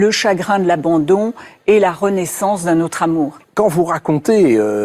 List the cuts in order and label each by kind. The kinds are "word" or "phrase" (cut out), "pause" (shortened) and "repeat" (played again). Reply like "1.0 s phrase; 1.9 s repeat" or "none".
none